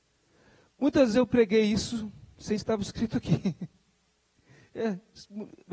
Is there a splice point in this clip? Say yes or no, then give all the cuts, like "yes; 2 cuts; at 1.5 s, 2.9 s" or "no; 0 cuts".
yes; 2 cuts; at 1.1 s, 2.6 s